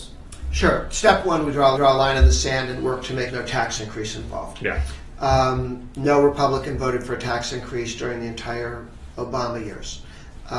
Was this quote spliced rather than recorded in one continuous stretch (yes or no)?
yes